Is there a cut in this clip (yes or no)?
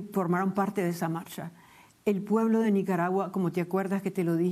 no